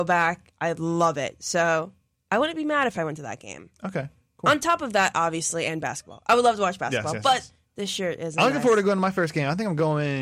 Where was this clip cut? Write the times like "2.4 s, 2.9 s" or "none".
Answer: none